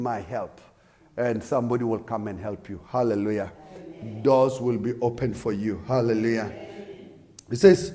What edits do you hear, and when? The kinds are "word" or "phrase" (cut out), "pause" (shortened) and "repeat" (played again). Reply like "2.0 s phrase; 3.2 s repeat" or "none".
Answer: none